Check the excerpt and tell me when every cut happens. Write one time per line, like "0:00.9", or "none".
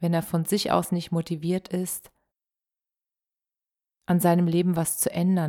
none

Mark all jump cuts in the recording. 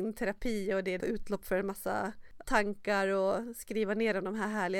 0:01.0
0:02.4

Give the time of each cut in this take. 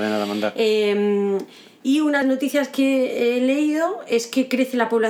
0:02.2

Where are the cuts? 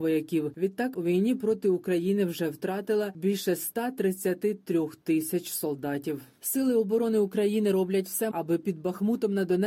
0:00.9
0:08.3

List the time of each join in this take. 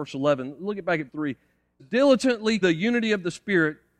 0:01.1
0:01.8
0:02.6

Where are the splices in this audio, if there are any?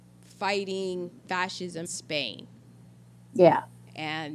0:01.2
0:01.8

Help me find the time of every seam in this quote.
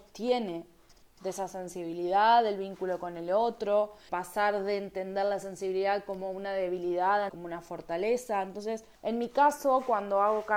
0:04.1
0:07.3
0:09.0

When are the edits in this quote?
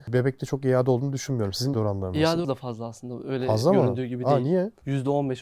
0:01.7
0:02.4

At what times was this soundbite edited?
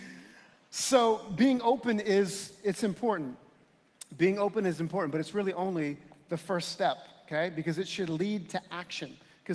none

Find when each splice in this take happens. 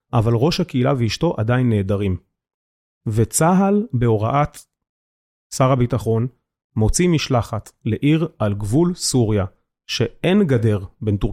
none

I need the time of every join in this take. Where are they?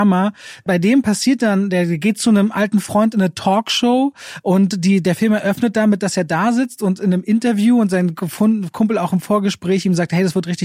none

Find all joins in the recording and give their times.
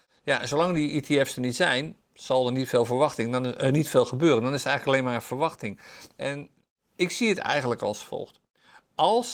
none

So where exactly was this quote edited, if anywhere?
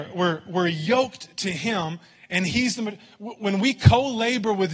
none

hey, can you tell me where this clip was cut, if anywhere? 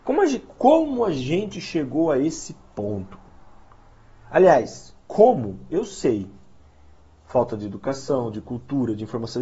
0:05.0

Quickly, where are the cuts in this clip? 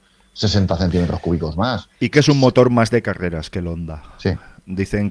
0:02.1

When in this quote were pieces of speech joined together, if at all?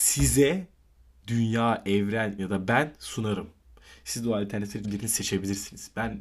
0:02.4
0:04.8

